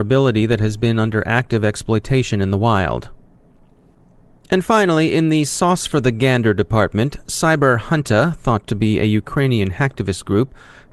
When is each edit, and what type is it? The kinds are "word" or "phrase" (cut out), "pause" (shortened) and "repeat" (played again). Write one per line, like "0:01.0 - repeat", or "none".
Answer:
none